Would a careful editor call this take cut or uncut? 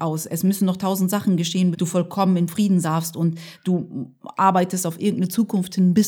cut